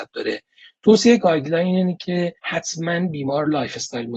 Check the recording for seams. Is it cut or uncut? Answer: cut